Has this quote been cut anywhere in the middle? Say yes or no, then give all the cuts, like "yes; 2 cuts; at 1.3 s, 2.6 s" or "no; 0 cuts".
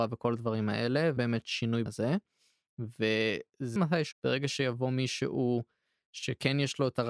yes; 4 cuts; at 1.2 s, 1.9 s, 3.8 s, 4.1 s